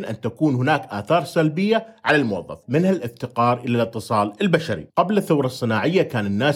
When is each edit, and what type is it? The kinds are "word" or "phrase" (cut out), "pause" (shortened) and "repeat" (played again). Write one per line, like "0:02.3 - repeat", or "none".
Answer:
none

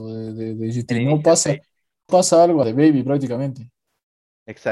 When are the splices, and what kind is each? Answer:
0:02.1 - word
0:02.6 - word

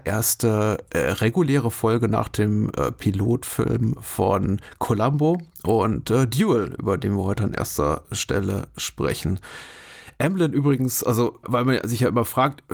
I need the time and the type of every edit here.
0:11.4 - word

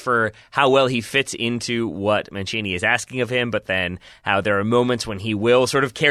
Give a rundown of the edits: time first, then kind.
none

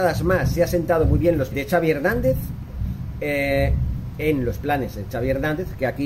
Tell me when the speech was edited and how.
0:01.5 - phrase

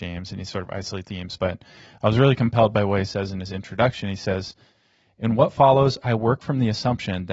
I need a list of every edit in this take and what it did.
0:01.0 - word

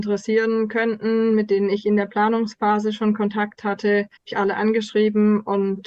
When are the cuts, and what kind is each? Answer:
0:04.2 - pause

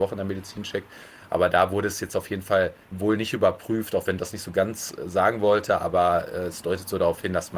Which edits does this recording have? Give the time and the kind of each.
0:02.8 - pause
0:04.2 - word

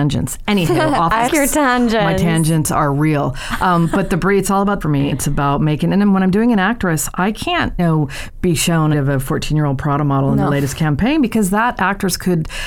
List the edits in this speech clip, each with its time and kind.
0:01.3 - word
0:04.8 - phrase
0:05.1 - word
0:07.8 - word
0:08.9 - phrase

